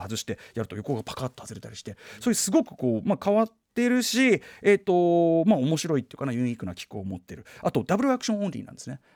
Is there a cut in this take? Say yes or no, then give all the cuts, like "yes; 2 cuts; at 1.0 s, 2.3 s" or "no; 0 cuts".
no; 0 cuts